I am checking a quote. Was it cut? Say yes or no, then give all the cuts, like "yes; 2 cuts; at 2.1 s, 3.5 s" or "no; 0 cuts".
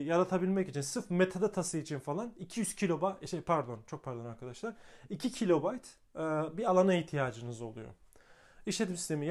no; 0 cuts